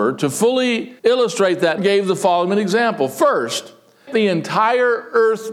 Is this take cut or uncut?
cut